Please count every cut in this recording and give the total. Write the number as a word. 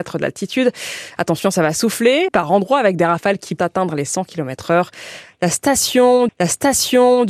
three